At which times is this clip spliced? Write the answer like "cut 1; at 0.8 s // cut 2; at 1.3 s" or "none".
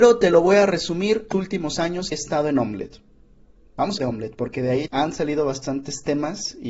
cut 1; at 1.3 s // cut 2; at 2.1 s // cut 3; at 4.0 s // cut 4; at 4.9 s